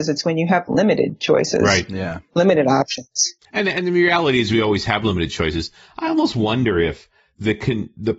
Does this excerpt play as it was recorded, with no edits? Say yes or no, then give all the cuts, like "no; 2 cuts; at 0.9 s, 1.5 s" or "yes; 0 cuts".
yes; 0 cuts